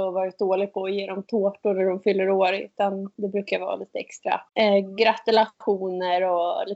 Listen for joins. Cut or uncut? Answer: cut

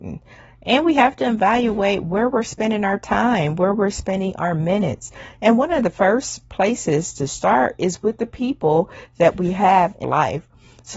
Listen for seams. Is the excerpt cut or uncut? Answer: cut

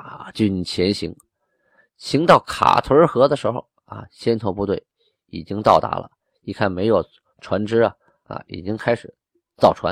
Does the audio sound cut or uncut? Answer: uncut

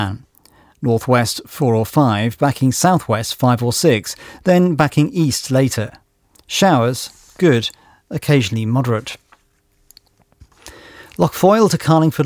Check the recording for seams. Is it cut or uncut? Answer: uncut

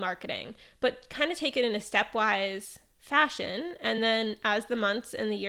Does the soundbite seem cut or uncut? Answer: uncut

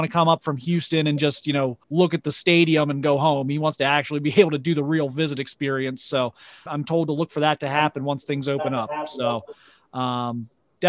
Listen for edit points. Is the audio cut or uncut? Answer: cut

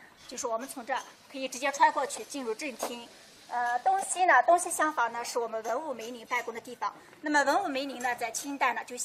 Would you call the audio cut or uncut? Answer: uncut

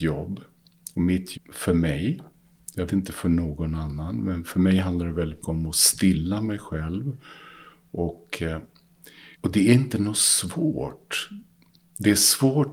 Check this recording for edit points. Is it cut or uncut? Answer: cut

